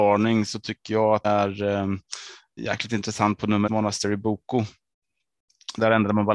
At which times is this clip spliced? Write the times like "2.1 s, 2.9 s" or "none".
1.2 s, 2.6 s, 3.7 s

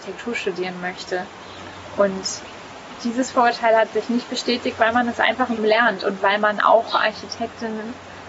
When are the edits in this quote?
5.6 s

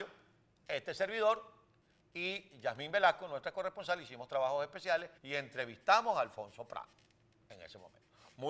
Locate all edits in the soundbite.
5.2 s

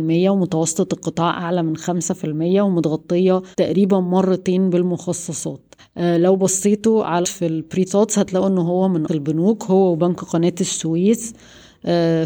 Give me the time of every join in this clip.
3.5 s, 5.8 s, 7.2 s, 7.9 s, 9.1 s

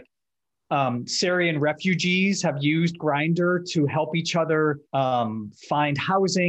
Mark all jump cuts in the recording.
4.9 s

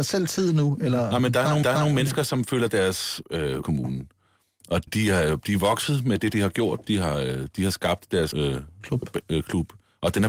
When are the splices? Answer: 1.6 s, 3.2 s, 3.6 s, 4.9 s, 8.3 s

